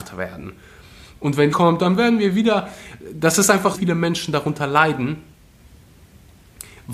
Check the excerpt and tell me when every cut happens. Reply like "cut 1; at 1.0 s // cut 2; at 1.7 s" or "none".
cut 1; at 1.5 s // cut 2; at 3.7 s